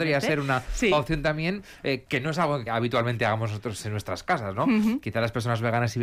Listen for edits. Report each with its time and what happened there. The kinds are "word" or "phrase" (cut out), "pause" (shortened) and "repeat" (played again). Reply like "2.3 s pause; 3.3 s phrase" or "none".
2.7 s word